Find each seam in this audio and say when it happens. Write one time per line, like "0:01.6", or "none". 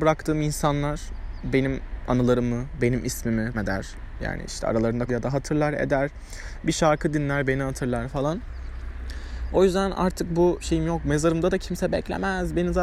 0:03.5
0:05.1
0:10.6